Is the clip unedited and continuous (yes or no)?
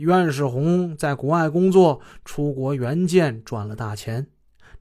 yes